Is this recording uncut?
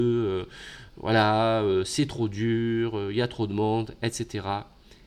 yes; 0 cuts

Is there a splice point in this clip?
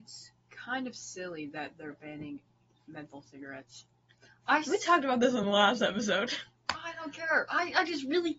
no; 0 cuts

